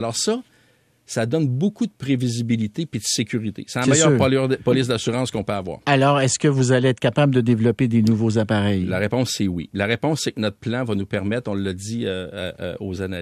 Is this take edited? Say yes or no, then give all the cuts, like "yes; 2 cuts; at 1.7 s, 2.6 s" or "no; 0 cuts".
no; 0 cuts